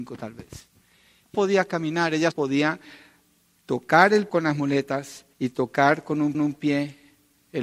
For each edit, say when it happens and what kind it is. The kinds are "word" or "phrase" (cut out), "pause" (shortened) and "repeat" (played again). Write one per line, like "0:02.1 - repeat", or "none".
0:01.3 - phrase
0:02.3 - word
0:04.3 - word
0:05.3 - pause
0:06.3 - repeat